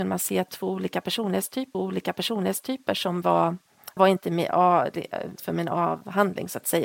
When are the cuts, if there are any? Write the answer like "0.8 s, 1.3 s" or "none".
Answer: 1.7 s, 4.0 s, 5.4 s